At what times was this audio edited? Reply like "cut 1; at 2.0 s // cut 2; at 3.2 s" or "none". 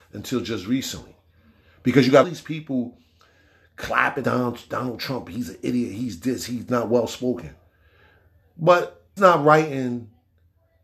cut 1; at 2.2 s // cut 2; at 4.2 s // cut 3; at 6.7 s // cut 4; at 9.2 s